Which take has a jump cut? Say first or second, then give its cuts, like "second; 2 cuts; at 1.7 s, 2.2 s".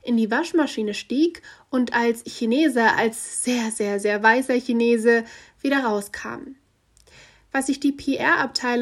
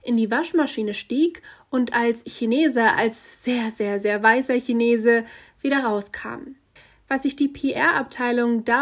second; 1 cut; at 6.8 s